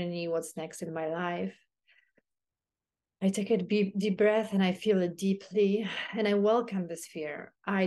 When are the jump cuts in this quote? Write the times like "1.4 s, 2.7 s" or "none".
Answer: none